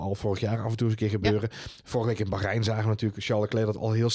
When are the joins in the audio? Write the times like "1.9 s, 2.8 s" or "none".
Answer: none

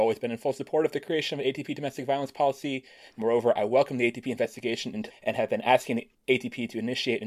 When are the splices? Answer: 5.1 s

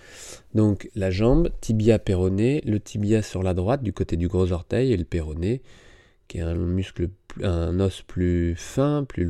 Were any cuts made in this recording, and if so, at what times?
none

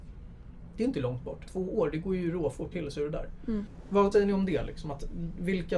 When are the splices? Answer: 1.5 s, 2.7 s, 4.1 s

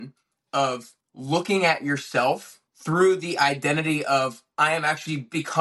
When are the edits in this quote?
1.0 s, 2.7 s

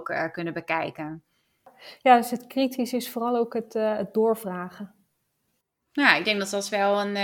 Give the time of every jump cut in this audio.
none

